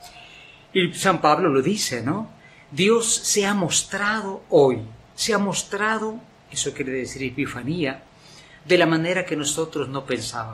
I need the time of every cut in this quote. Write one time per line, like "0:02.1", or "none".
none